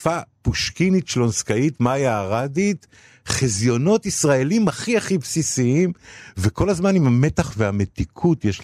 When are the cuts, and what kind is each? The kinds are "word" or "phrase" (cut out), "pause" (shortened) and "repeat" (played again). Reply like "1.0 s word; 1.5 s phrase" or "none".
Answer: none